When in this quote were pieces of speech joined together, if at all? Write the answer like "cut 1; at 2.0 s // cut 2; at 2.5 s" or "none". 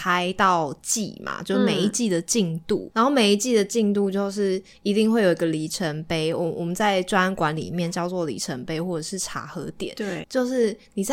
cut 1; at 2.9 s // cut 2; at 10.2 s